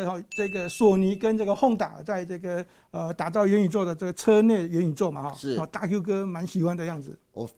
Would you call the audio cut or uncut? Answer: uncut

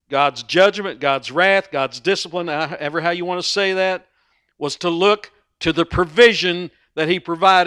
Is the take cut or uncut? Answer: uncut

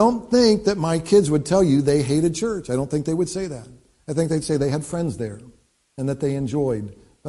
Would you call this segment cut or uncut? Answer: uncut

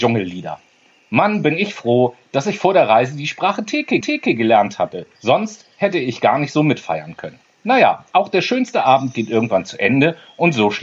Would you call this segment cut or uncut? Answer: cut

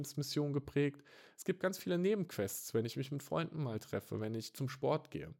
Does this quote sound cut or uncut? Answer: uncut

